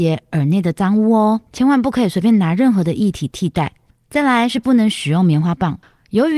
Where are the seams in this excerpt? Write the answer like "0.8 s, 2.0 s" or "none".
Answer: 1.5 s, 3.9 s